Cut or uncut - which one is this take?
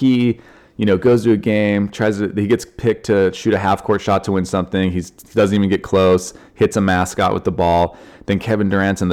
uncut